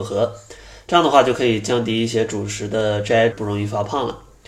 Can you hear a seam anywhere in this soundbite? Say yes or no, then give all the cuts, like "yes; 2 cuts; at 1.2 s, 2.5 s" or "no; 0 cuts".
yes; 1 cut; at 3.3 s